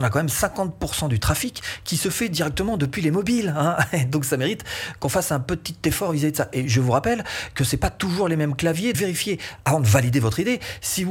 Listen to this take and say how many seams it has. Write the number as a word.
one